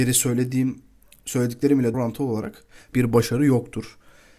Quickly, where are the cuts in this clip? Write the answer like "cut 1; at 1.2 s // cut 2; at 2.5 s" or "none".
cut 1; at 1.9 s // cut 2; at 2.9 s